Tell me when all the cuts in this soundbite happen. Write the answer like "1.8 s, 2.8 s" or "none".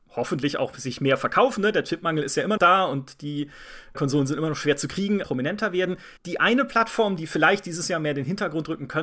2.6 s, 3.9 s, 5.2 s, 6.2 s

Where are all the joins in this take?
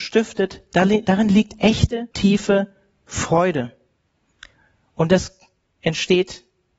2.1 s

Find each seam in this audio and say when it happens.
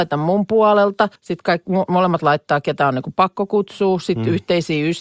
1.2 s

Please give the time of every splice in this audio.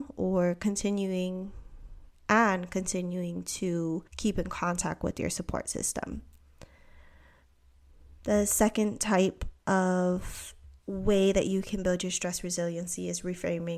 4.1 s, 10.8 s

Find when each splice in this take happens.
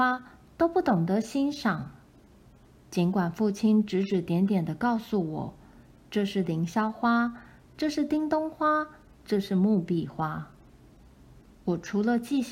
none

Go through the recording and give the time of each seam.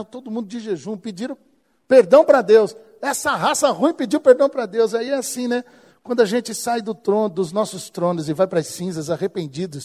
none

